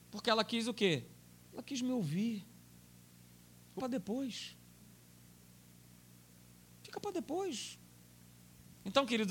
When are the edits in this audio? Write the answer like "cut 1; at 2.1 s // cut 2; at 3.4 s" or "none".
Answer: cut 1; at 3.8 s